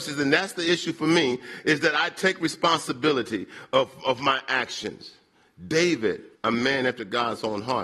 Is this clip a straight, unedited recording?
no; 1 cut; at 6.4 s

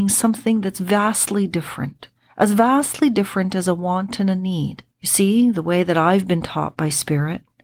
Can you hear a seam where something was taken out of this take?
yes; 2 cuts; at 2.1 s, 4.9 s

